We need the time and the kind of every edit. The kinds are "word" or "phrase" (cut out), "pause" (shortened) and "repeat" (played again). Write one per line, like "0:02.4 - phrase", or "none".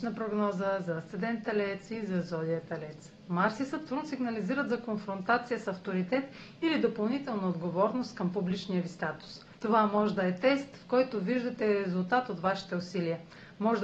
0:09.5 - pause